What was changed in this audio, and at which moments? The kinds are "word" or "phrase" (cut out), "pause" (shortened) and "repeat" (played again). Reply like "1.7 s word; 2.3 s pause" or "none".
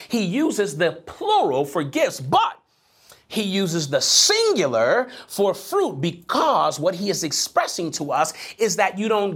none